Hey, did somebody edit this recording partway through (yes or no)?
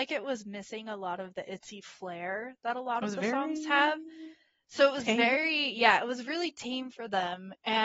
no